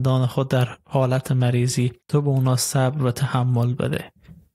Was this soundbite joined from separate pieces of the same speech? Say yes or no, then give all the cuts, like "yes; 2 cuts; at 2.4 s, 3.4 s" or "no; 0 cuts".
yes; 1 cut; at 2.0 s